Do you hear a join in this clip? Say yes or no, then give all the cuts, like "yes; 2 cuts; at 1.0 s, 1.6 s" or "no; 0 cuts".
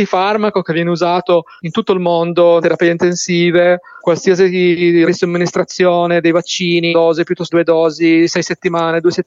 yes; 5 cuts; at 2.6 s, 4.0 s, 5.1 s, 6.9 s, 7.5 s